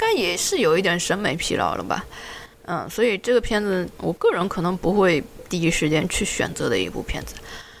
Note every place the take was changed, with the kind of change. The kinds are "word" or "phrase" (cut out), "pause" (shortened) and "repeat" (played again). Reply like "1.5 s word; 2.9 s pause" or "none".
2.5 s pause; 3.9 s word